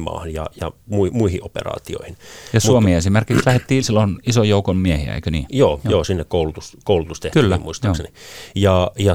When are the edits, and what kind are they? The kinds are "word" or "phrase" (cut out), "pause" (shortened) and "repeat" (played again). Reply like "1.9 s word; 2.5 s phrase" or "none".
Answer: 3.8 s word